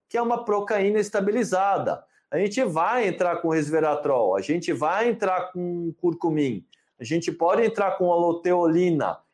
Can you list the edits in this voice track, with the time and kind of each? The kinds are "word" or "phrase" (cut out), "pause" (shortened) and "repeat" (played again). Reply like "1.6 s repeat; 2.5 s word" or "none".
none